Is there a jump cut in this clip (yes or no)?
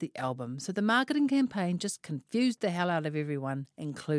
no